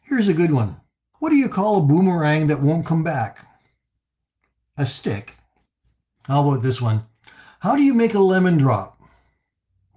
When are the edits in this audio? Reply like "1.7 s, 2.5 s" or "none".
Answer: none